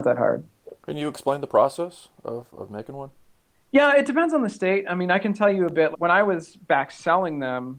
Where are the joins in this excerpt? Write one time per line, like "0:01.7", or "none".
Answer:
0:05.9